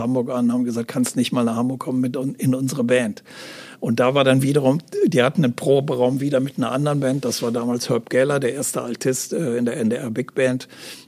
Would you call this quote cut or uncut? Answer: uncut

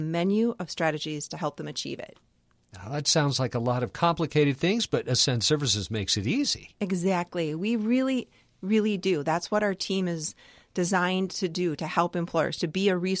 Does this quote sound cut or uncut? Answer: uncut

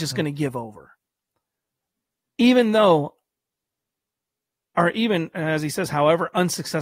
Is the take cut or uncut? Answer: uncut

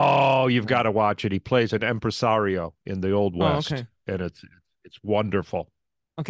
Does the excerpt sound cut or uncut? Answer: uncut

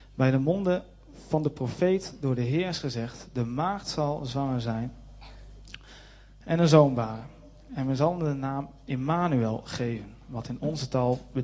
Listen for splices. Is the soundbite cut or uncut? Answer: uncut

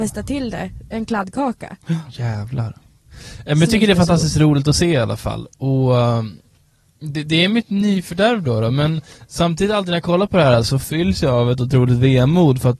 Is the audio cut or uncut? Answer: uncut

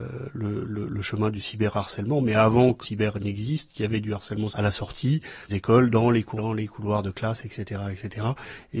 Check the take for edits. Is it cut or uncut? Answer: cut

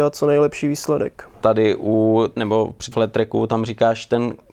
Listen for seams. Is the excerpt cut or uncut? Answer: cut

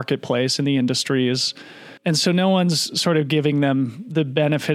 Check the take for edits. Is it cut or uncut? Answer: cut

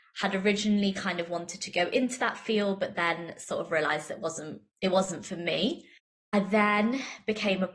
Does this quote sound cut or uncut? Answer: uncut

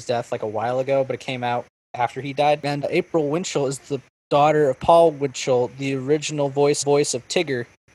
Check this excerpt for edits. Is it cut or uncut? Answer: cut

